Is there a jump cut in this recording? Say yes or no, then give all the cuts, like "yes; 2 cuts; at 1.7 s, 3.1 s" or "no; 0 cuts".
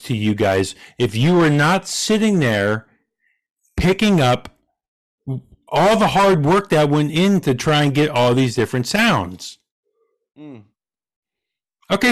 no; 0 cuts